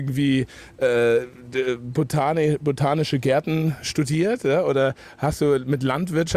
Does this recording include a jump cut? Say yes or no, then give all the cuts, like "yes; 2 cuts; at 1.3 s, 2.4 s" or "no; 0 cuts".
no; 0 cuts